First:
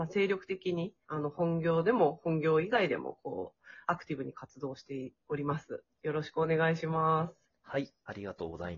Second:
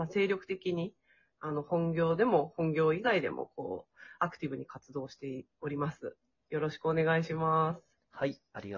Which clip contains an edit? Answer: first; 2 cuts; at 1.0 s, 5.9 s

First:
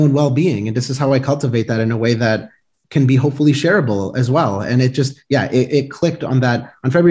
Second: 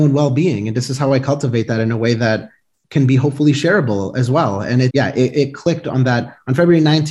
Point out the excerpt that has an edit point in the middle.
second; 1 cut; at 4.9 s

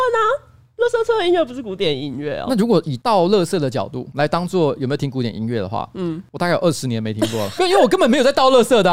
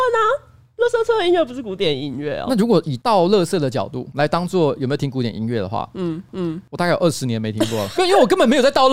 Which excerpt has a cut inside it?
second; 1 cut; at 6.3 s

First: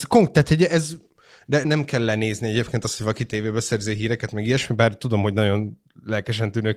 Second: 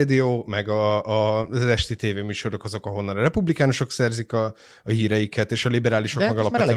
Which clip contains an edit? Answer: first; 1 cut; at 1.6 s

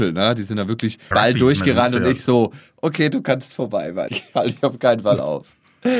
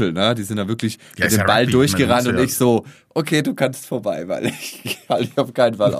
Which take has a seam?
first; 2 cuts; at 1.1 s, 4.1 s

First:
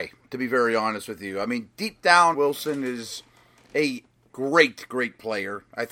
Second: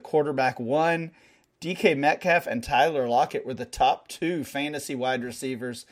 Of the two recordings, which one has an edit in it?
first; 1 cut; at 2.3 s

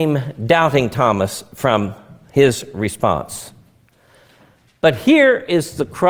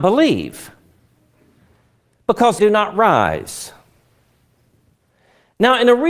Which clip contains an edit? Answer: second; 1 cut; at 2.6 s

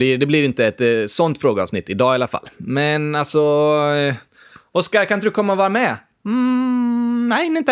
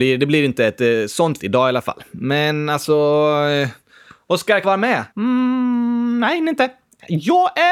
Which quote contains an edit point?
second; 3 cuts; at 1.4 s, 4.6 s, 5.1 s

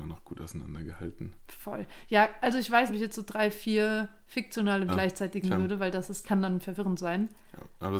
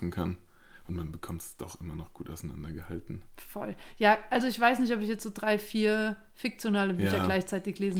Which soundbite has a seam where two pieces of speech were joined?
first; 4 cuts; at 2.9 s, 4.9 s, 5.4 s, 6.2 s

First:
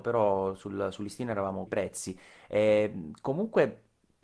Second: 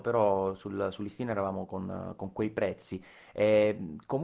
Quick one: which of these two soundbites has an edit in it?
first; 1 cut; at 1.7 s

